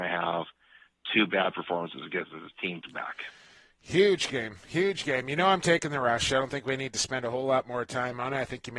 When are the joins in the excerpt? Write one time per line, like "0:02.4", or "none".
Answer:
0:02.8